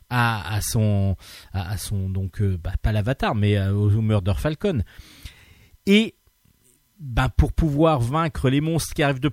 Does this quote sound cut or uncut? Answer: uncut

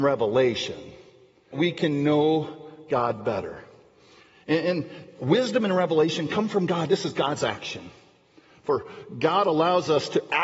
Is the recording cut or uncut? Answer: cut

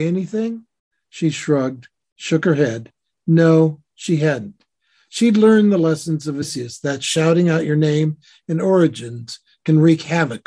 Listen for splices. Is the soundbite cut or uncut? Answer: uncut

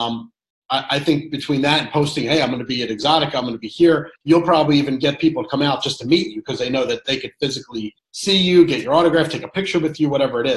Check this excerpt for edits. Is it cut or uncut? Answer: cut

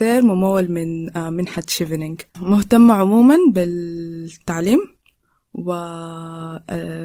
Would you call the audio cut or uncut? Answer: uncut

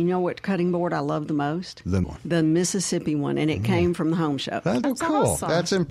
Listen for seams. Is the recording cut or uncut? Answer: cut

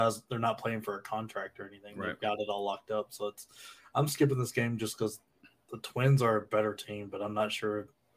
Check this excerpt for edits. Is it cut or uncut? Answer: uncut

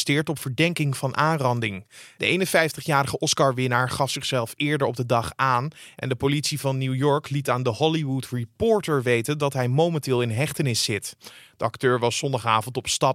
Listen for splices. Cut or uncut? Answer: uncut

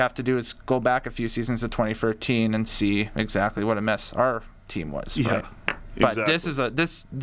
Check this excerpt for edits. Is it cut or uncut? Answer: uncut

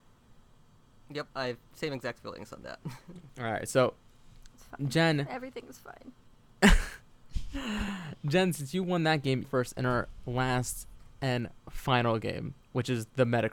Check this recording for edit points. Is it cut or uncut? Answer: cut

